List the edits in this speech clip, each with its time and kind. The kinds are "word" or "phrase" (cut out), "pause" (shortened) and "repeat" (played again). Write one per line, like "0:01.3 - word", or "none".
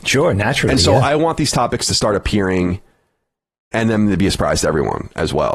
none

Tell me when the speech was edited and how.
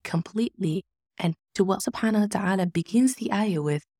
0:01.4 - phrase
0:01.8 - word

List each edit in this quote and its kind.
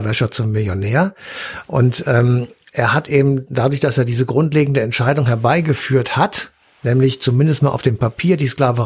none

